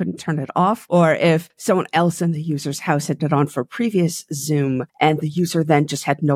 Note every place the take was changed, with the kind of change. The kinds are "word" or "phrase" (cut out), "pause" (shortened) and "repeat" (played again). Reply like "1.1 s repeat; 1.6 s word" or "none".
3.2 s word